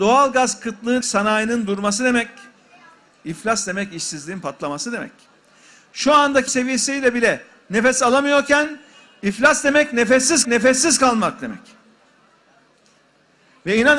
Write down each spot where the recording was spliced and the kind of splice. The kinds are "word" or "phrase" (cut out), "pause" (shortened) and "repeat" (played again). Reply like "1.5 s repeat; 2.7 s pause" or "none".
1.0 s word; 6.5 s word; 10.4 s repeat